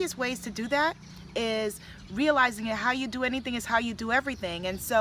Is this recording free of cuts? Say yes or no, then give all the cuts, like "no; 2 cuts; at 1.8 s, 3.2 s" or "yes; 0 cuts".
yes; 0 cuts